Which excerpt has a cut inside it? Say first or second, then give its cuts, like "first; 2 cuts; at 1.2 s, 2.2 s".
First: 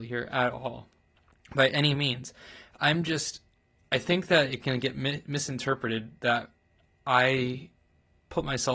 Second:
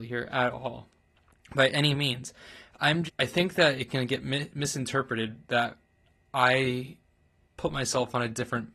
second; 1 cut; at 3.1 s